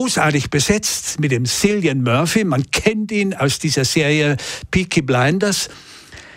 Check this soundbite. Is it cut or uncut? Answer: uncut